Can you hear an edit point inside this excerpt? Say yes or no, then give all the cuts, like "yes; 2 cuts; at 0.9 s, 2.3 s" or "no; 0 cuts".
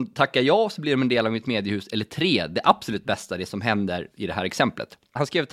yes; 1 cut; at 4.1 s